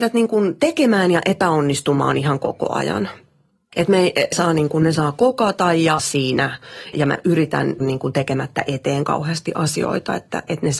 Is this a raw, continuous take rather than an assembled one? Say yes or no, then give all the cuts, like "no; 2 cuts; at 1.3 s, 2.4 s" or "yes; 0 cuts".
no; 4 cuts; at 4.3 s, 6.0 s, 6.9 s, 7.8 s